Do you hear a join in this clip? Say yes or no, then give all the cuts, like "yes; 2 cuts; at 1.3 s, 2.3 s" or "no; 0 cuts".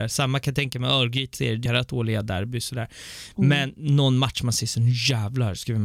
yes; 2 cuts; at 1.3 s, 1.7 s